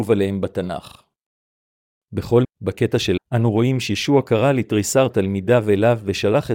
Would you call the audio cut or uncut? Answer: cut